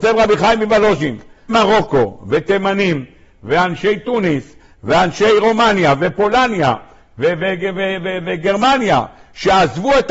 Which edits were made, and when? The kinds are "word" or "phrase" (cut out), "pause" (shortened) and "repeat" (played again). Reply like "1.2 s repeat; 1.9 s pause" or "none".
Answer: 1.5 s word